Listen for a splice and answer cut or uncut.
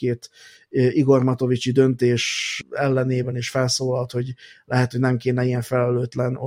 uncut